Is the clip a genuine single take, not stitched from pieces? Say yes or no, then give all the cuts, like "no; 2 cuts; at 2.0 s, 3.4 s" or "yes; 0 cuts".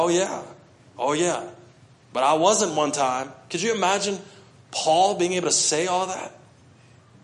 yes; 0 cuts